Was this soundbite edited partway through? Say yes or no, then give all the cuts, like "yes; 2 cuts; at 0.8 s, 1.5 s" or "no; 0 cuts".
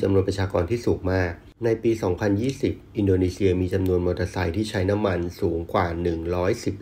no; 0 cuts